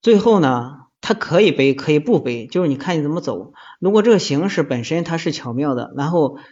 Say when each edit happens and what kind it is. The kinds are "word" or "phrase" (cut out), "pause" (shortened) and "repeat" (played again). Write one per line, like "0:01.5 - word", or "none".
0:01.0 - pause